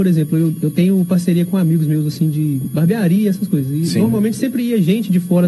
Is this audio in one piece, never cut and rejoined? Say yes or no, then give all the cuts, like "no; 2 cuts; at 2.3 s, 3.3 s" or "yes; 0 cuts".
yes; 0 cuts